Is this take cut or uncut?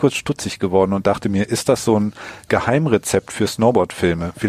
uncut